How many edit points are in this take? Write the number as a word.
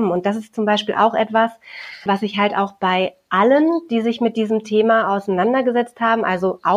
one